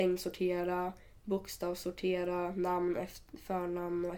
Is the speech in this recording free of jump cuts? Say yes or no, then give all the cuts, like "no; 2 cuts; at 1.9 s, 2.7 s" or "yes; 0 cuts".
yes; 0 cuts